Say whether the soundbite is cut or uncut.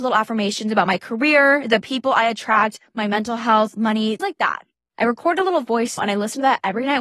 cut